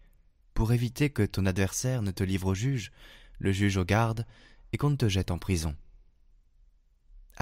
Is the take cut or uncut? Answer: uncut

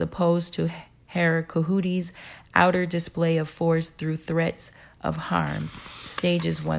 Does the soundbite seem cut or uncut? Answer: uncut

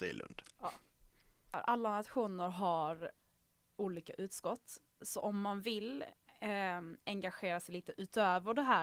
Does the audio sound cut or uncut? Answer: uncut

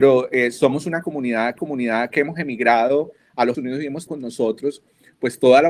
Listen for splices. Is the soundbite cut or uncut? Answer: cut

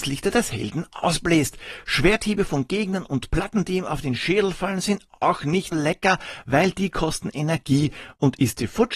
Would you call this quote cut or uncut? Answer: cut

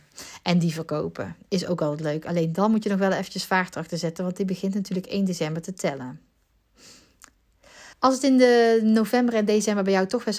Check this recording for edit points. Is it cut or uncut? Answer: cut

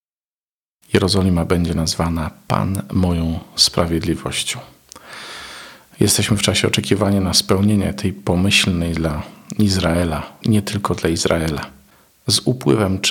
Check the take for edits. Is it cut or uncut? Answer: cut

